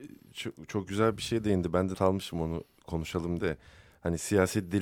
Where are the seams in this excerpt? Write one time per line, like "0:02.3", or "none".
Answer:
0:01.9
0:03.4